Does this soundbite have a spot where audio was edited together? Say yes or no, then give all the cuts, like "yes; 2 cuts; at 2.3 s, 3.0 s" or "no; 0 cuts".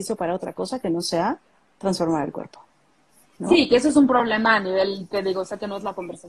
no; 0 cuts